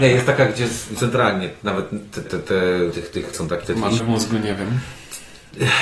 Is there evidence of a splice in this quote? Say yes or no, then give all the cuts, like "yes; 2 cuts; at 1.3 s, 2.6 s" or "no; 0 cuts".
yes; 6 cuts; at 1.0 s, 2.3 s, 2.9 s, 3.3 s, 3.6 s, 4.0 s